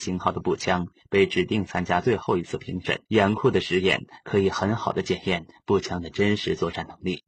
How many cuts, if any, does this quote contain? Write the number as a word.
one